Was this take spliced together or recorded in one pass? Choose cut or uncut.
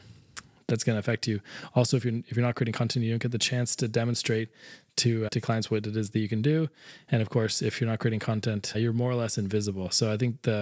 cut